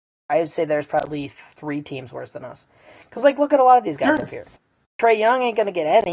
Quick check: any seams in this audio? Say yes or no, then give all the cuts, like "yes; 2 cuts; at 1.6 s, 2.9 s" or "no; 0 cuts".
no; 0 cuts